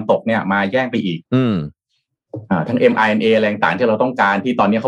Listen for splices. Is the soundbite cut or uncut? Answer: cut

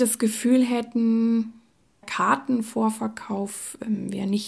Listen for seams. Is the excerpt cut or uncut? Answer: cut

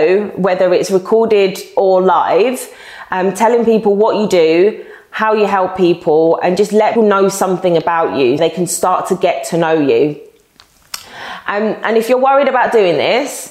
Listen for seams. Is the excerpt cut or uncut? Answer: cut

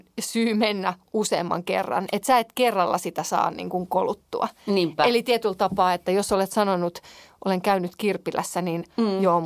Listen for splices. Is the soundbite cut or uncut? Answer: uncut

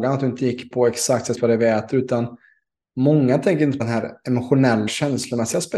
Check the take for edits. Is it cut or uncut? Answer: cut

